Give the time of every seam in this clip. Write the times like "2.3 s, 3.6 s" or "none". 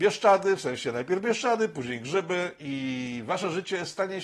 none